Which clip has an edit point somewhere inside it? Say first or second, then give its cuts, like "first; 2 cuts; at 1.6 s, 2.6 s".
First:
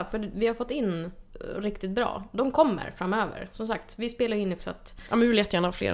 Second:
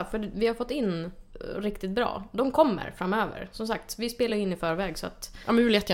first; 1 cut; at 4.6 s